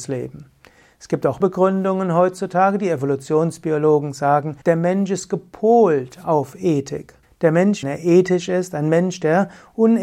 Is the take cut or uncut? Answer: cut